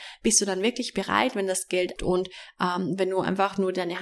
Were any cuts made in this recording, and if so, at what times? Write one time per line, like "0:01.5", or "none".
0:02.0